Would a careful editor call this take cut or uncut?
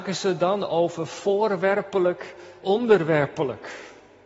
cut